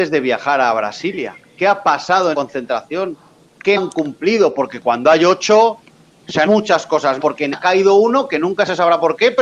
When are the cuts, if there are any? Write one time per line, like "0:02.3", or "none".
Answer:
0:02.3
0:03.8
0:06.5
0:07.2
0:07.5